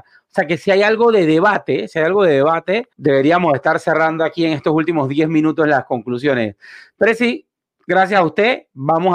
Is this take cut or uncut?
cut